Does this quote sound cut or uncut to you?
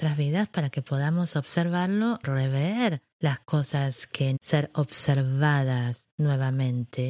cut